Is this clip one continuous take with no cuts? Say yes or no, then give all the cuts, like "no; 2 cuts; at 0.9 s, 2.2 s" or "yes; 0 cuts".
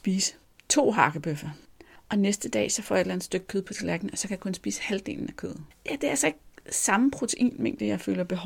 yes; 0 cuts